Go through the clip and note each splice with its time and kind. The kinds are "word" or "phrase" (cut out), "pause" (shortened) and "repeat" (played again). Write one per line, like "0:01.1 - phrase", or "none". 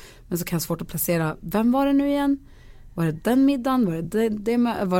none